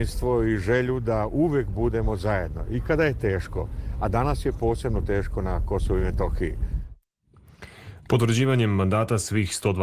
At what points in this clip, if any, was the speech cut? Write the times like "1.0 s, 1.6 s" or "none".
none